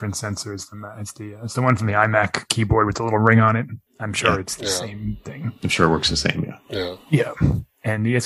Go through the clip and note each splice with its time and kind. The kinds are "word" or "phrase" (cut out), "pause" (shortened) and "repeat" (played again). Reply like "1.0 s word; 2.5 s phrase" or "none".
3.9 s pause